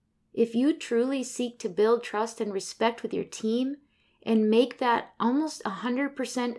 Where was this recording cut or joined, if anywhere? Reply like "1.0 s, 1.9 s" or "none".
none